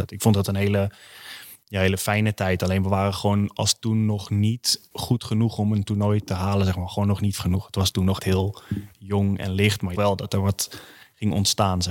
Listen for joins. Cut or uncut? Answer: cut